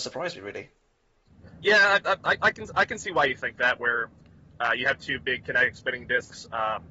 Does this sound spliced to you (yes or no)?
no